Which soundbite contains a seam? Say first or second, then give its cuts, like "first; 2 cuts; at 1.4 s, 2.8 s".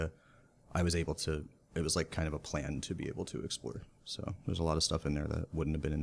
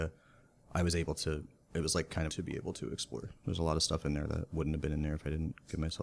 second; 2 cuts; at 2.3 s, 3.4 s